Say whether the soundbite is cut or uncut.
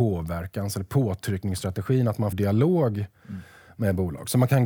cut